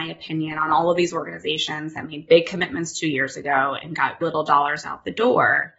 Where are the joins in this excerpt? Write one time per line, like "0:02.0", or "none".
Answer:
0:04.2